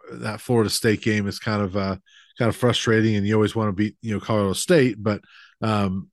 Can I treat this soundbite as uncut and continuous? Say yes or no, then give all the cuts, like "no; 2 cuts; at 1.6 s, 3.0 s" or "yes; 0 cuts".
yes; 0 cuts